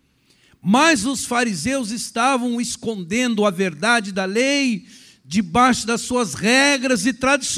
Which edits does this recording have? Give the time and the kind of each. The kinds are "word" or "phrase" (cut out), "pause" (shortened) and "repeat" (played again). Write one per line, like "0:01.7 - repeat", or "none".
none

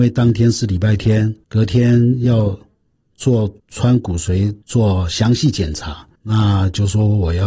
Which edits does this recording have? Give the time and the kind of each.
0:01.4 - pause
0:03.6 - pause
0:04.6 - pause
0:06.1 - pause

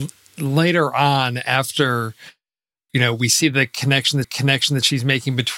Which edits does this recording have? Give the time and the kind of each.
0:02.9 - word
0:04.2 - repeat

